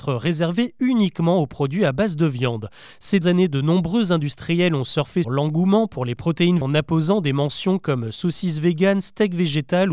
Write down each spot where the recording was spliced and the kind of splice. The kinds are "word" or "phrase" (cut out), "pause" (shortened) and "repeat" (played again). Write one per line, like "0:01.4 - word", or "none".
0:03.2 - word
0:05.2 - word
0:06.6 - word